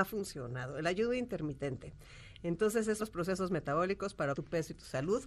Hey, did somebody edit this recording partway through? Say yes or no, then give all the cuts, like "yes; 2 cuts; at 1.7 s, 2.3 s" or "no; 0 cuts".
yes; 2 cuts; at 3.0 s, 4.3 s